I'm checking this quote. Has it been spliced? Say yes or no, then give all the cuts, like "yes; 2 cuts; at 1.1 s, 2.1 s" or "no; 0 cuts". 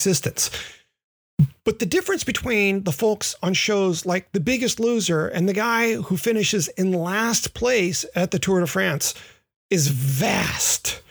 no; 0 cuts